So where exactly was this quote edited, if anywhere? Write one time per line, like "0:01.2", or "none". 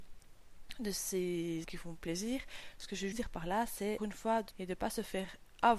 0:01.6
0:03.1
0:04.0
0:04.5

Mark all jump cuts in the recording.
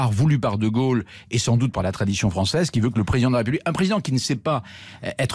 none

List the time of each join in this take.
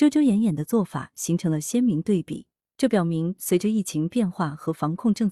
none

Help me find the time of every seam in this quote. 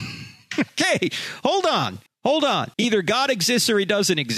0:02.1
0:02.7

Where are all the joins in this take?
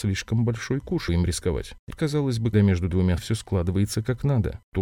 0:01.1
0:01.9
0:02.5
0:03.2

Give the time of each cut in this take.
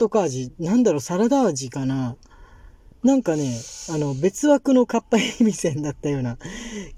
none

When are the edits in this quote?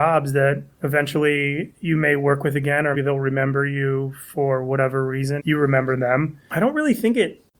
0:02.9
0:05.4

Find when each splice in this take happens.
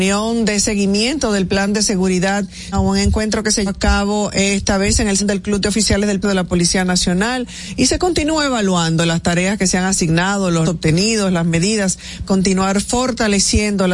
0:02.7
0:03.7
0:05.2
0:06.2
0:10.6
0:12.3

